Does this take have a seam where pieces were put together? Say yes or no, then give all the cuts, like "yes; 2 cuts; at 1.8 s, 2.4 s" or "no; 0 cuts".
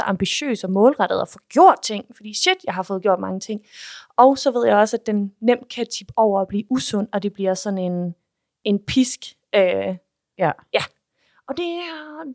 no; 0 cuts